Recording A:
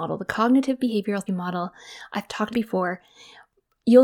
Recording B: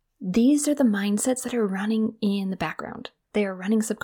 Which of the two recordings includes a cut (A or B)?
A